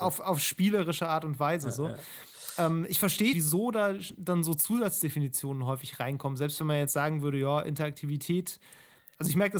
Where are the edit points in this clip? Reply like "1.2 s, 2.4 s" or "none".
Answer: 3.3 s